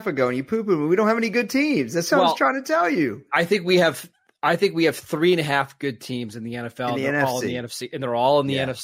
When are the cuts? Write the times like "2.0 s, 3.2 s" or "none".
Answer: none